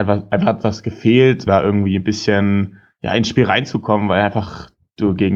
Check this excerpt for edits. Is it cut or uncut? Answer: cut